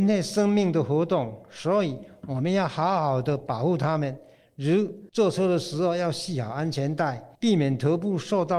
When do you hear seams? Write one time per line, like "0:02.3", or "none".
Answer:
0:05.1
0:07.3